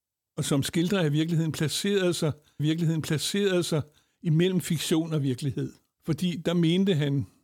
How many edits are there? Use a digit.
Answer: 2